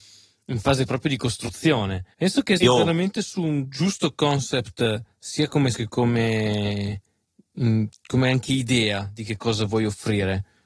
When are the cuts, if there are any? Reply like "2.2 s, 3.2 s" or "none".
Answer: 2.1 s, 2.6 s, 5.7 s